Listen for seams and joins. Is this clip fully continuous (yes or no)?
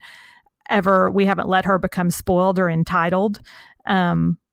yes